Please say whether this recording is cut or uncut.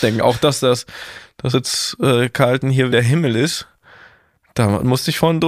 cut